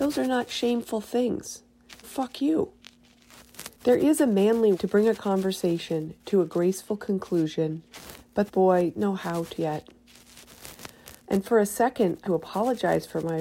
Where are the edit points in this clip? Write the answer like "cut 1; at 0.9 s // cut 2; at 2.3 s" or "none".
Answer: cut 1; at 2.0 s // cut 2; at 3.7 s // cut 3; at 4.7 s // cut 4; at 8.5 s // cut 5; at 9.0 s // cut 6; at 9.6 s // cut 7; at 11.2 s // cut 8; at 12.2 s